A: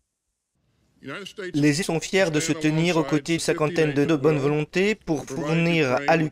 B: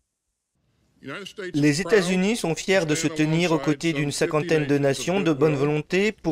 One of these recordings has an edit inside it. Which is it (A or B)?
A